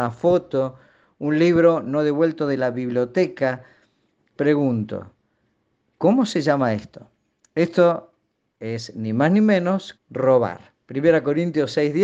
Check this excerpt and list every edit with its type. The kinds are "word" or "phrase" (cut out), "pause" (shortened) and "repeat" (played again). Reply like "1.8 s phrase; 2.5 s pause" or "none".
4.4 s word; 9.9 s word